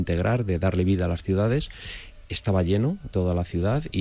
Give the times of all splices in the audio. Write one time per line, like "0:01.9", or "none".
0:03.1